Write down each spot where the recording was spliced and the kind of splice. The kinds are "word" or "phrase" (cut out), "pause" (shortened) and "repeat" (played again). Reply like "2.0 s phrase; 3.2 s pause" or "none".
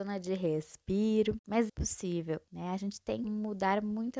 1.7 s word; 2.5 s pause; 3.2 s word